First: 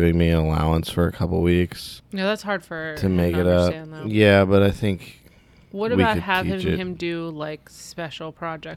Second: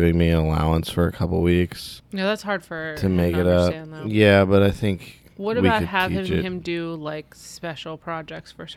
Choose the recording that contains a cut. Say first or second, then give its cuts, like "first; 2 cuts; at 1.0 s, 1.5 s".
second; 1 cut; at 5.3 s